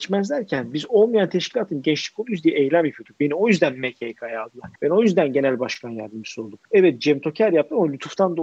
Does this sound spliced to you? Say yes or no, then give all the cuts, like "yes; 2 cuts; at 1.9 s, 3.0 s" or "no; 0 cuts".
yes; 2 cuts; at 4.8 s, 6.6 s